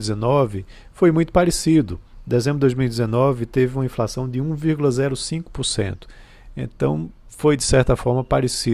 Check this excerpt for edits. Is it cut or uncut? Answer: uncut